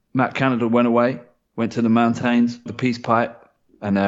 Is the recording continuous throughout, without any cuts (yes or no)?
no